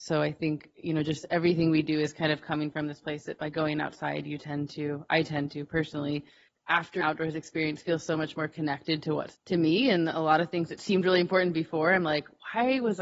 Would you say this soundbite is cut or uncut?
cut